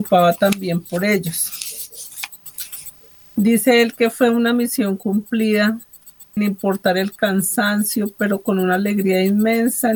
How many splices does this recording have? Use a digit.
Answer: 1